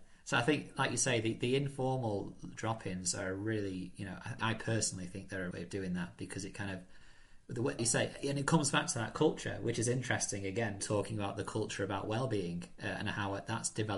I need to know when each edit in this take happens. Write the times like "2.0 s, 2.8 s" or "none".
4.4 s, 5.5 s, 7.8 s, 10.8 s